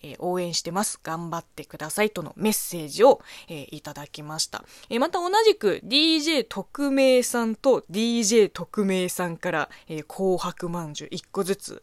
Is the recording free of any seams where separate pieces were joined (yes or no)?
yes